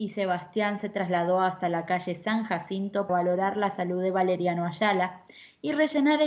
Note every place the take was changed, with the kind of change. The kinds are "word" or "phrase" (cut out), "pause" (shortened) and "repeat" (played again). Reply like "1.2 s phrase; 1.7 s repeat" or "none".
3.1 s word